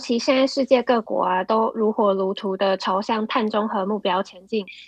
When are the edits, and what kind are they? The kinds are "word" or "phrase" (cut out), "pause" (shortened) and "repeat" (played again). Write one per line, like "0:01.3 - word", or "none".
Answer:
none